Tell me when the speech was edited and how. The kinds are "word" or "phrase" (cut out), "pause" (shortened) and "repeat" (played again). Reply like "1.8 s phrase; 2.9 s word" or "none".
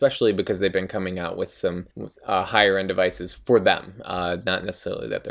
1.9 s pause